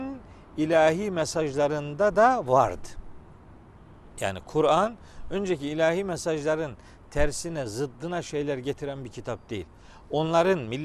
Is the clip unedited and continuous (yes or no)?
yes